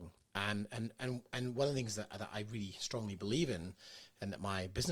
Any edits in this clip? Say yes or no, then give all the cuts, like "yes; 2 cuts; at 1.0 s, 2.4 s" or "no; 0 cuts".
no; 0 cuts